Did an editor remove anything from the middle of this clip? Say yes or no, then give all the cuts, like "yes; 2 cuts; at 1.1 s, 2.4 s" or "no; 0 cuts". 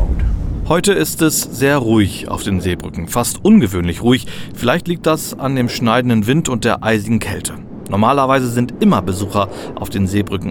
no; 0 cuts